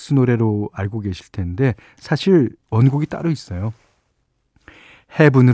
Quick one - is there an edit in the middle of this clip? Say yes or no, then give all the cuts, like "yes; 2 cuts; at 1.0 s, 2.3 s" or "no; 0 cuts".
no; 0 cuts